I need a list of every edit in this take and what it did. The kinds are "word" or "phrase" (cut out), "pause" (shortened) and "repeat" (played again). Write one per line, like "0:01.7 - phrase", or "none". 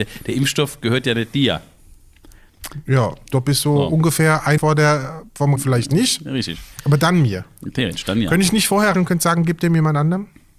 0:04.6 - word
0:05.6 - word
0:08.9 - word